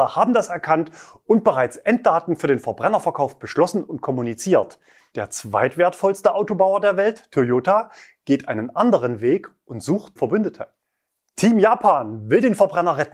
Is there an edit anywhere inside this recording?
yes; 1 cut; at 10.2 s

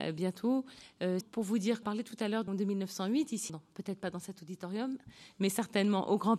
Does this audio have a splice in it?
yes; 4 cuts; at 1.2 s, 1.8 s, 2.5 s, 3.5 s

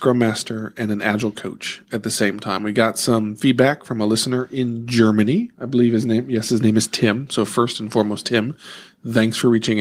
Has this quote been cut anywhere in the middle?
yes; 1 cut; at 5.5 s

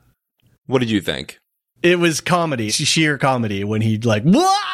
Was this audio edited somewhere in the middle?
yes; 1 cut; at 2.7 s

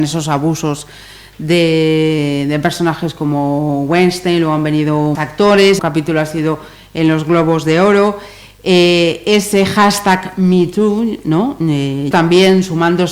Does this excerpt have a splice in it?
yes; 3 cuts; at 5.1 s, 5.8 s, 12.1 s

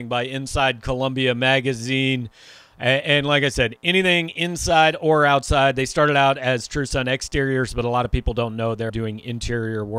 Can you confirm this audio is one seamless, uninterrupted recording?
no; 1 cut; at 8.9 s

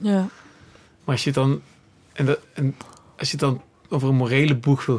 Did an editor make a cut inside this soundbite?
no; 0 cuts

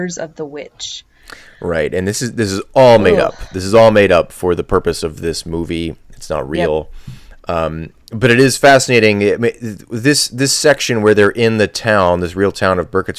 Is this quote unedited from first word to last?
yes; 0 cuts

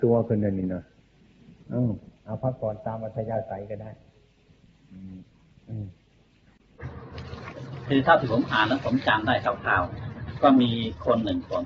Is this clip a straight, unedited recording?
no; 1 cut; at 2.2 s

